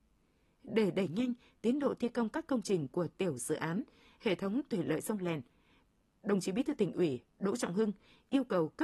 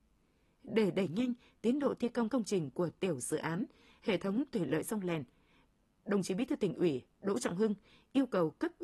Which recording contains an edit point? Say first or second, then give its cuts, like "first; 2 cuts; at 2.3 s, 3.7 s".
second; 1 cut; at 2.3 s